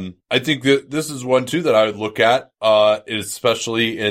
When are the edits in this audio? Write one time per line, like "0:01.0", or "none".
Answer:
none